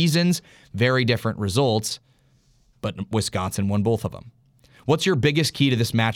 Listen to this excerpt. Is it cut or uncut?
uncut